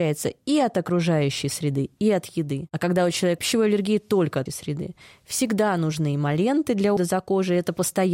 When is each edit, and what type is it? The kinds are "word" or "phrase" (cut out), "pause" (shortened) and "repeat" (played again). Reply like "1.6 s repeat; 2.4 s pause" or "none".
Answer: 3.4 s word; 4.5 s word; 7.0 s word